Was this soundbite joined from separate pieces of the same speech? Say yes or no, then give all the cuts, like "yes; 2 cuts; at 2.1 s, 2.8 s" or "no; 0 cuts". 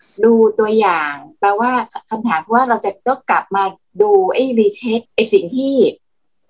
yes; 1 cut; at 5.1 s